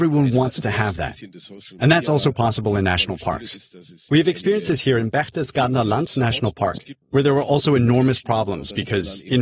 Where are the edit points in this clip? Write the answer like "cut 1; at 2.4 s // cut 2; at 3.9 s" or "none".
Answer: none